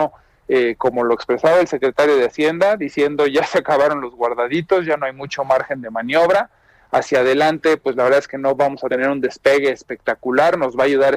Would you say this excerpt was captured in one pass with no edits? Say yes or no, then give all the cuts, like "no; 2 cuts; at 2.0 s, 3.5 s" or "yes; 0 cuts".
yes; 0 cuts